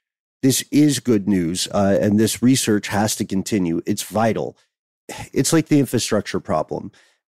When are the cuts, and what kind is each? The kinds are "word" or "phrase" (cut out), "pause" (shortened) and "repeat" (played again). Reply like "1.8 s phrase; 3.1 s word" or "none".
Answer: none